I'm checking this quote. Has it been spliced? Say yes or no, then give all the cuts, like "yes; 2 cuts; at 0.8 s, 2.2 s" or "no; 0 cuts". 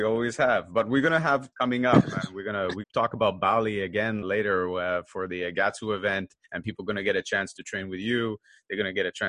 yes; 4 cuts; at 1.5 s, 2.8 s, 4.2 s, 6.4 s